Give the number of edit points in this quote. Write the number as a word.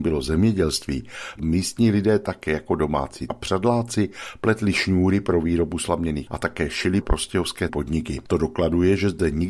five